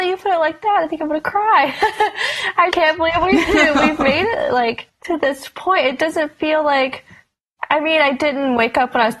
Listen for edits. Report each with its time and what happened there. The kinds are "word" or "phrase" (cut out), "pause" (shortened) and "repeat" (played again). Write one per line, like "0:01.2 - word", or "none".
0:02.7 - word

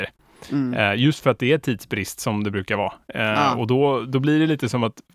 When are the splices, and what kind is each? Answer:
none

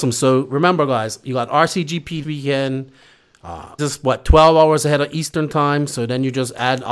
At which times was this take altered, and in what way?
0:02.2 - word
0:03.8 - word

